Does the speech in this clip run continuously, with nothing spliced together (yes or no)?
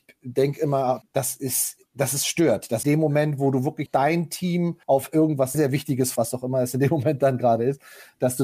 no